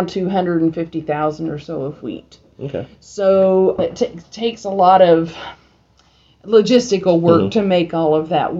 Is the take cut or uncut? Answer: cut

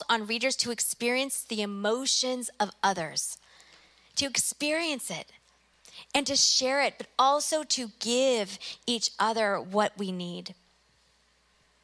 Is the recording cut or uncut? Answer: uncut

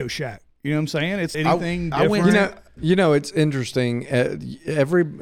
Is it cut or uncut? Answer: cut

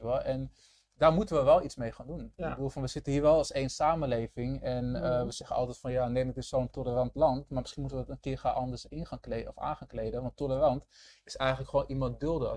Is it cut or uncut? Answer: uncut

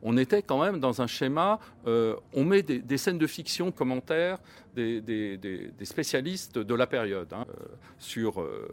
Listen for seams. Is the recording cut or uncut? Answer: cut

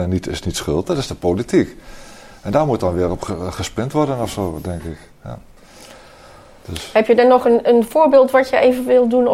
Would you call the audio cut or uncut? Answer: uncut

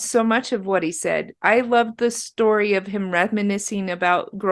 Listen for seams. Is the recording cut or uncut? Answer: uncut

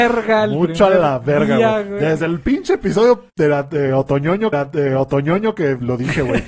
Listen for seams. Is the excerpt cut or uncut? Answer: cut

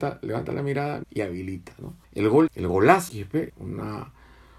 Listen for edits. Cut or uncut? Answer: cut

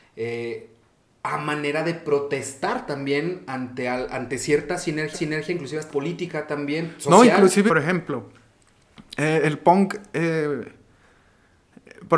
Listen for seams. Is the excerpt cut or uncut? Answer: cut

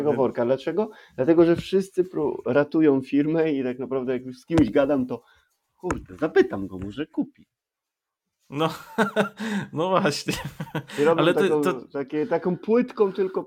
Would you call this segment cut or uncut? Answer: uncut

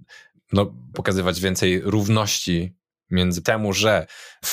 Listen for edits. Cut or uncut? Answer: cut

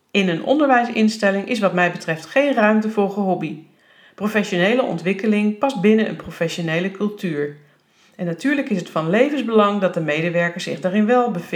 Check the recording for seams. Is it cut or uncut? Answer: uncut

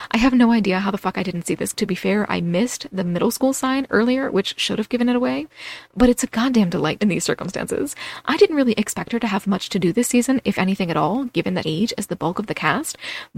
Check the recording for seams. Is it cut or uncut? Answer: cut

